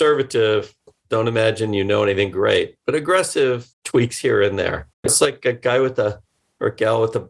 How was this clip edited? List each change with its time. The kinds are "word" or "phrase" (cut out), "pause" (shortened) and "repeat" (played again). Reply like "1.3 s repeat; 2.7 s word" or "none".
3.7 s pause; 4.9 s pause